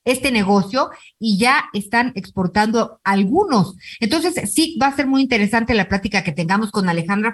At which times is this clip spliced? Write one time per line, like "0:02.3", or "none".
none